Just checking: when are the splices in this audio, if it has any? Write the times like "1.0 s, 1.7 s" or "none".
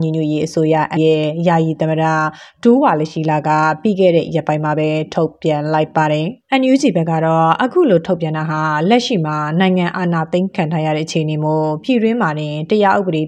1.0 s, 6.4 s